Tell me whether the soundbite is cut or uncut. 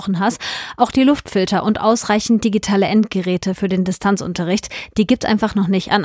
uncut